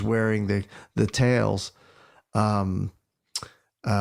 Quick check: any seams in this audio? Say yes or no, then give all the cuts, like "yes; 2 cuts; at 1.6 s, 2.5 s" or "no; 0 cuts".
no; 0 cuts